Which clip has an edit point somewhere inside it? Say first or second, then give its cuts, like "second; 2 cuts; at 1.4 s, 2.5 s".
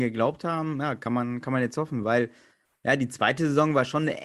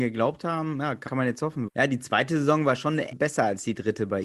second; 3 cuts; at 1.1 s, 1.7 s, 3.1 s